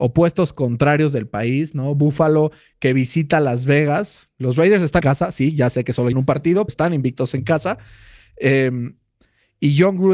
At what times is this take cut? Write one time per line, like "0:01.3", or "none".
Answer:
0:05.0
0:06.1
0:06.7